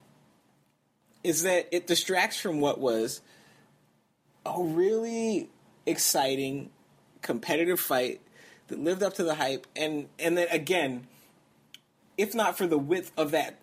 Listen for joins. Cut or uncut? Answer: uncut